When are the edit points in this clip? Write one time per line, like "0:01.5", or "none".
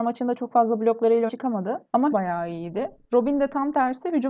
0:01.3
0:02.1